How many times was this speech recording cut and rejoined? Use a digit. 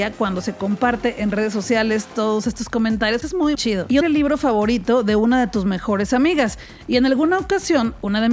3